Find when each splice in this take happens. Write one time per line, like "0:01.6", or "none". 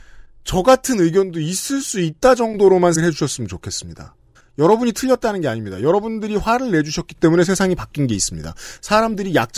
0:03.0
0:04.4